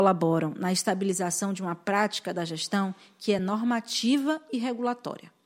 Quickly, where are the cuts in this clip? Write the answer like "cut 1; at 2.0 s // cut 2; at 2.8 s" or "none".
none